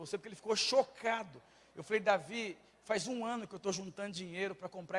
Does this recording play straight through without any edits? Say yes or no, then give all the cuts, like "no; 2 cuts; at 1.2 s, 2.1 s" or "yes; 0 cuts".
yes; 0 cuts